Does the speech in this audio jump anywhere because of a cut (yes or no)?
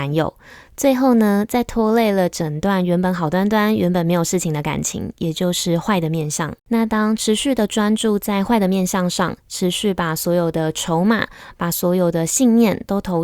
yes